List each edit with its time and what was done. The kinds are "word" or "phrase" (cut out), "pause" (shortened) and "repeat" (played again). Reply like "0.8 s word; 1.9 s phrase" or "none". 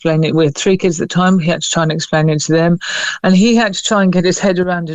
none